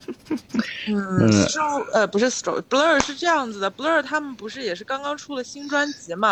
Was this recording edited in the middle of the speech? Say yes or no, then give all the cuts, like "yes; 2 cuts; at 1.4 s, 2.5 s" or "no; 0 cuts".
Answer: no; 0 cuts